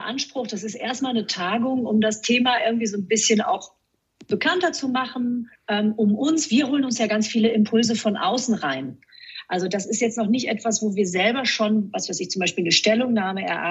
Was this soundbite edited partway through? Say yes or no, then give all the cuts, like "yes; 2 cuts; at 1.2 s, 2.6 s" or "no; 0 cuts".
yes; 1 cut; at 5.6 s